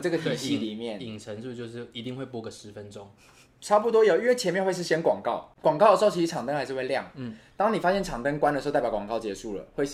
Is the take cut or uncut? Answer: uncut